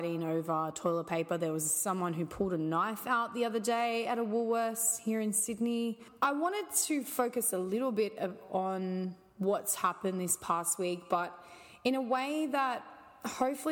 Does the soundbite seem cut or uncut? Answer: uncut